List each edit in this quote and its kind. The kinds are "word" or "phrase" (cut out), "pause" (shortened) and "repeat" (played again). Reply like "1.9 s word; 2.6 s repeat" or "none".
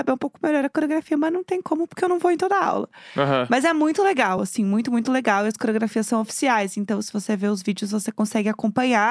none